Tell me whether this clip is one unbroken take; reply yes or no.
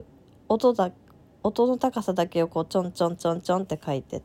yes